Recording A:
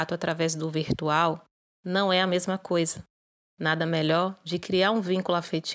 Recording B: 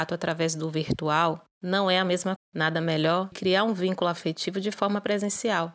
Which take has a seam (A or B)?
B